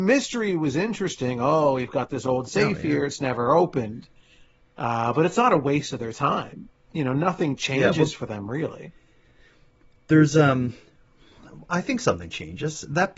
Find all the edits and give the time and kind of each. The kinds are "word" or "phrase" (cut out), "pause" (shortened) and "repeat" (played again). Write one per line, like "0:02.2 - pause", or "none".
none